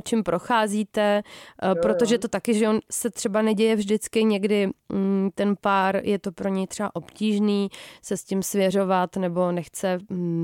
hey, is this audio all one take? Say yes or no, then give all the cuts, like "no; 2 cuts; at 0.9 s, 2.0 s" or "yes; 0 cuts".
yes; 0 cuts